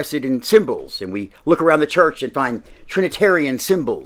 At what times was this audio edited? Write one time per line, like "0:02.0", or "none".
none